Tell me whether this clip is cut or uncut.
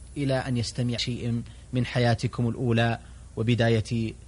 cut